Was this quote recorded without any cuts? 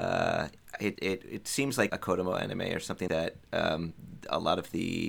no; 4 cuts; at 1.0 s, 1.9 s, 3.1 s, 3.4 s

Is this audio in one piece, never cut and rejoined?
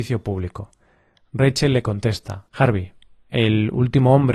no; 1 cut; at 2.5 s

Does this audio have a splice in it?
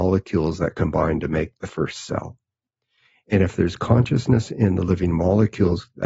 no; 0 cuts

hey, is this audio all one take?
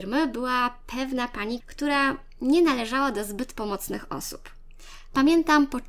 no; 1 cut; at 1.6 s

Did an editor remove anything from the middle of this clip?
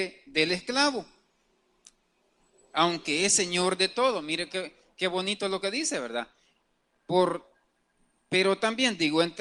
no; 0 cuts

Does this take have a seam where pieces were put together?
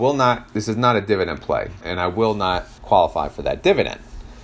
yes; 2 cuts; at 1.8 s, 2.8 s

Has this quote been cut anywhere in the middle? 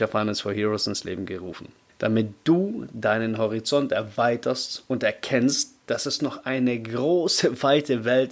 no; 0 cuts

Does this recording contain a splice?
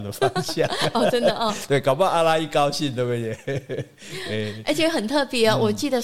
no; 0 cuts

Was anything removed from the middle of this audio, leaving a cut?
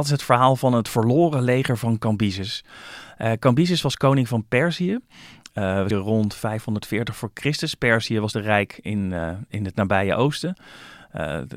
yes; 2 cuts; at 5.9 s, 8.3 s

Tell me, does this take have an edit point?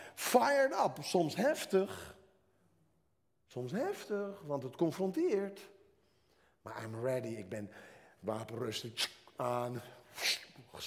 no; 0 cuts

